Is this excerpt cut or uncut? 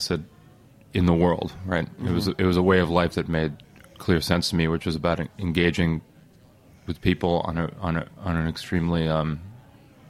uncut